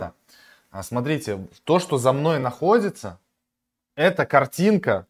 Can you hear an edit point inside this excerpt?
no; 0 cuts

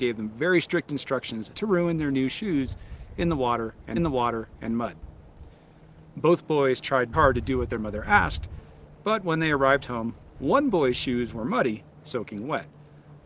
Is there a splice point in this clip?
yes; 4 cuts; at 1.5 s, 4.0 s, 7.1 s, 12.0 s

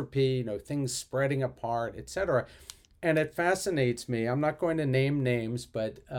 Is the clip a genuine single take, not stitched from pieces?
yes; 0 cuts

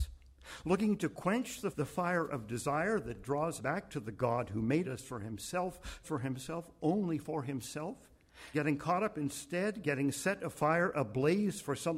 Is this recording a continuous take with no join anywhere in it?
no; 5 cuts; at 1.7 s, 3.6 s, 4.8 s, 6.0 s, 8.5 s

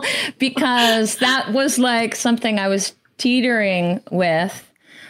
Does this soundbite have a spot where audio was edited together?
no; 0 cuts

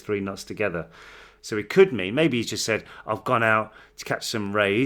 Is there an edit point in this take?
no; 0 cuts

